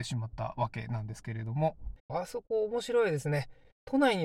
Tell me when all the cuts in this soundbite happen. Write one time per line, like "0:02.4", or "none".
0:02.0